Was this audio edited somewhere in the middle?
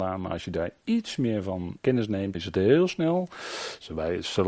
yes; 2 cuts; at 1.8 s, 2.3 s

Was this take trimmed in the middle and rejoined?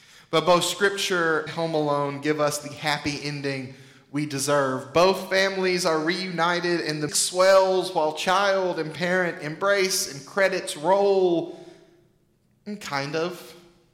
yes; 2 cuts; at 1.5 s, 7.1 s

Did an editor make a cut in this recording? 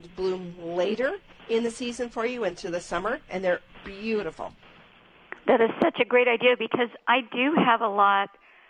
no; 0 cuts

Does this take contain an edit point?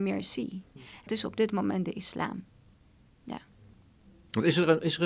yes; 1 cut; at 1.1 s

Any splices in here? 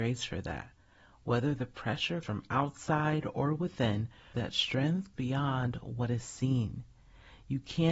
yes; 3 cuts; at 2.2 s, 4.3 s, 5.1 s

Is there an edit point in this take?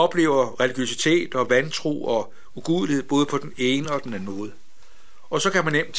no; 0 cuts

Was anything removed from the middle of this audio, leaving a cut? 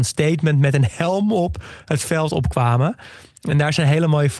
no; 0 cuts

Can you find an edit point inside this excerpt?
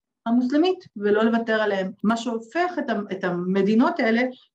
no; 0 cuts

